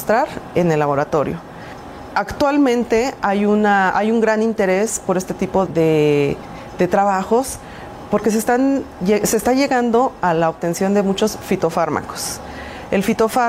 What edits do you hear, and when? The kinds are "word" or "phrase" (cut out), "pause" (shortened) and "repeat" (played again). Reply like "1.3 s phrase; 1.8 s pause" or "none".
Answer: 5.7 s word

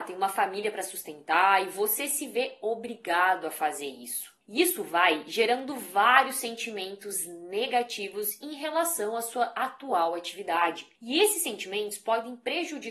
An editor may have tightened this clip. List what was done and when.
4.4 s pause; 11.0 s pause

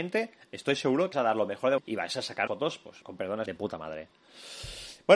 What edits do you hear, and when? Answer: 1.1 s word; 1.8 s word; 2.5 s word; 3.0 s pause; 3.5 s word

